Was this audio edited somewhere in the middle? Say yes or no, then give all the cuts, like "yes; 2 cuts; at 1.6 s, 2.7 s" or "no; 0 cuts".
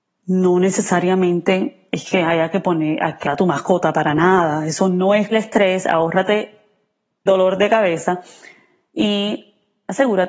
yes; 3 cuts; at 3.3 s, 5.3 s, 7.3 s